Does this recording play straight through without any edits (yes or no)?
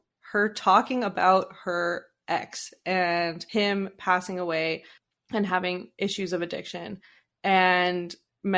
yes